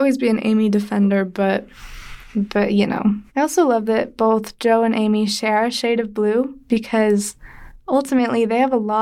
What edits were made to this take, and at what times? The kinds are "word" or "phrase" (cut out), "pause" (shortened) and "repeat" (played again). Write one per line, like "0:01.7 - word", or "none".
0:03.3 - pause

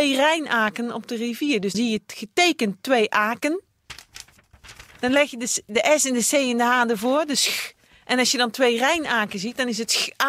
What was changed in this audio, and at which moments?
0:01.7 - word

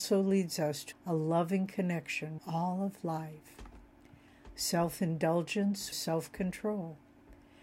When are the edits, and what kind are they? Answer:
0:00.9 - word
0:02.4 - word
0:05.9 - word

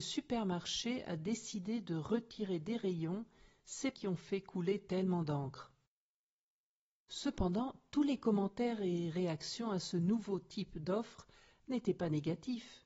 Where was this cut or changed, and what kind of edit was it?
0:03.9 - word

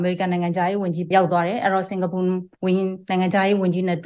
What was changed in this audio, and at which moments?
0:01.1 - word

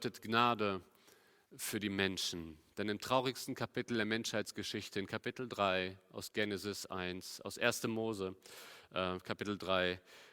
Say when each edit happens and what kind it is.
none

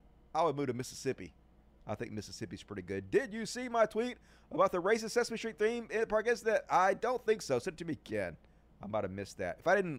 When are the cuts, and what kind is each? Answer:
none

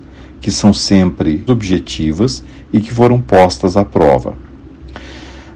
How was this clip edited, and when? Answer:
0:01.5 - word

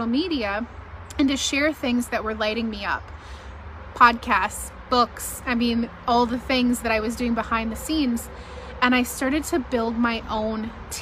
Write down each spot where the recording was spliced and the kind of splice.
none

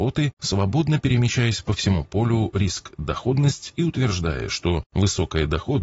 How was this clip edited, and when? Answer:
none

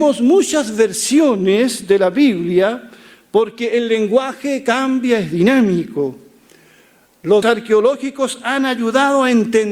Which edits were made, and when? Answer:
0:07.4 - word

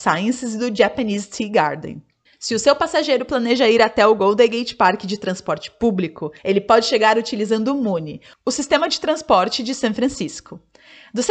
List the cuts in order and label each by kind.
0:06.4 - pause

